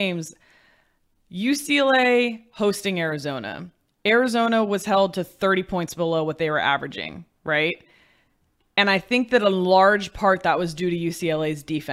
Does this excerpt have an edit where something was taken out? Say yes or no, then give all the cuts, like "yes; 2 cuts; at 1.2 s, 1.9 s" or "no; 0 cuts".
no; 0 cuts